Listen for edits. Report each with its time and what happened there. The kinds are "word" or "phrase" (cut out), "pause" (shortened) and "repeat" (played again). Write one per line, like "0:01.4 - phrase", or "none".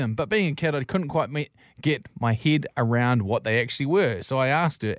none